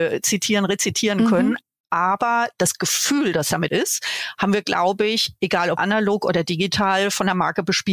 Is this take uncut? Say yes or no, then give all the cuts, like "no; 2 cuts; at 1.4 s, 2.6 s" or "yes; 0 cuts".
no; 2 cuts; at 3.7 s, 5.8 s